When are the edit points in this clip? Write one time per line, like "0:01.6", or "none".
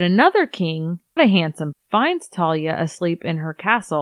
0:01.2
0:01.7